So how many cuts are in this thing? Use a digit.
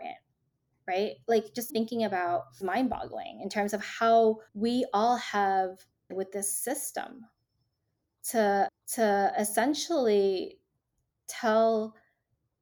5